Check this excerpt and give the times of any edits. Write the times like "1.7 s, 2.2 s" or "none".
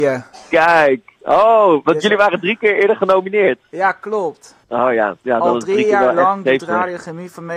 1.2 s, 4.6 s